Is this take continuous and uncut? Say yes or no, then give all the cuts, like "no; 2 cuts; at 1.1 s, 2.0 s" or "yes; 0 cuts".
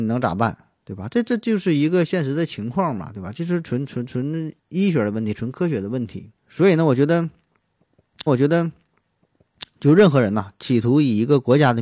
no; 3 cuts; at 4.6 s, 6.4 s, 8.3 s